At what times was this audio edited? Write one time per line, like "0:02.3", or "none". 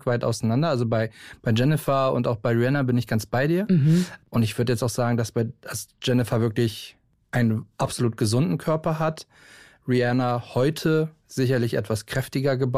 none